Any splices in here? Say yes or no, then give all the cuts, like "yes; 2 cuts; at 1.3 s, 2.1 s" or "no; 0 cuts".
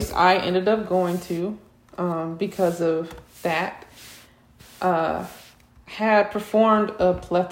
no; 0 cuts